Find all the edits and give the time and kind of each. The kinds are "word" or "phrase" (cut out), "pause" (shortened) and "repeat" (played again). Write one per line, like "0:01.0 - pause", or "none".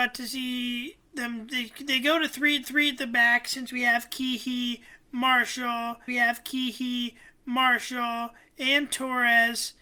0:01.1 - pause
0:02.6 - repeat
0:06.1 - repeat